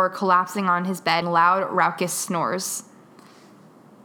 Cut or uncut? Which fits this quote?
cut